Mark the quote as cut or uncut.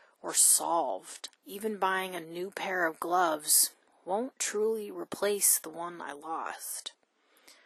cut